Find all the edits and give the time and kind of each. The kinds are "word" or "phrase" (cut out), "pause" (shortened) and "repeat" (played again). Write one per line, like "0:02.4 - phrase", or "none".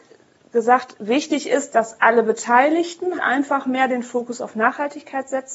0:03.2 - word